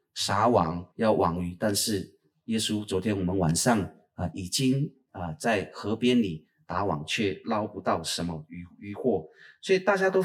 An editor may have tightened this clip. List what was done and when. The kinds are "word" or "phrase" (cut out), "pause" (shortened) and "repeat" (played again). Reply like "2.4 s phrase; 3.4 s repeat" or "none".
0.9 s pause